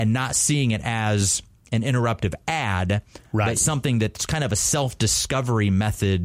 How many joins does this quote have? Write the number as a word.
zero